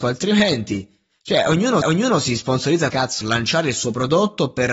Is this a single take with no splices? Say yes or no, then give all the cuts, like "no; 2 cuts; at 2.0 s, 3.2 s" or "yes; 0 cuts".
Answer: no; 3 cuts; at 1.8 s, 2.9 s, 3.2 s